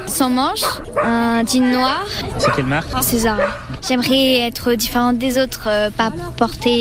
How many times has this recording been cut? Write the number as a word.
zero